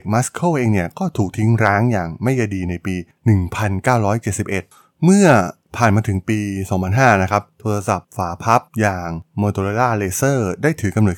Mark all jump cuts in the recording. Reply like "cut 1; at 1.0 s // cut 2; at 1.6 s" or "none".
cut 1; at 8.7 s